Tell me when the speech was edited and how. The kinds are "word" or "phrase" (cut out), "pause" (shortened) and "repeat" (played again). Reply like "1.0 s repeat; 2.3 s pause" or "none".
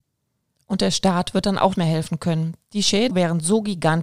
1.7 s word; 3.1 s phrase